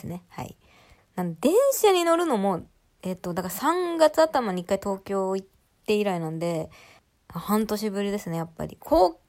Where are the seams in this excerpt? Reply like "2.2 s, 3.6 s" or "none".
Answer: none